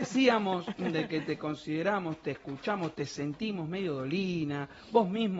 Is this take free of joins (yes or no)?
yes